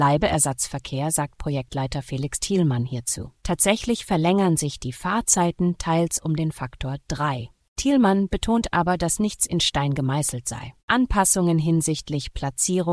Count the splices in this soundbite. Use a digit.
2